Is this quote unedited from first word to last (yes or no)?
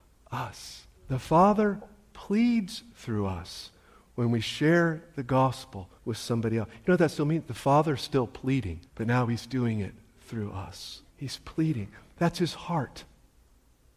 no